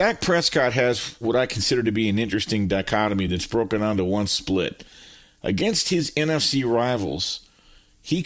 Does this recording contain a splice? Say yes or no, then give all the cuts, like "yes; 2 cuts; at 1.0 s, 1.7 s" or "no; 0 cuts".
no; 0 cuts